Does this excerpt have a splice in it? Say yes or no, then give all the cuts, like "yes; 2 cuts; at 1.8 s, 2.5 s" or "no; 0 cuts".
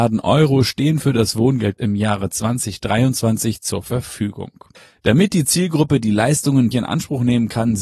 yes; 2 cuts; at 1.8 s, 6.7 s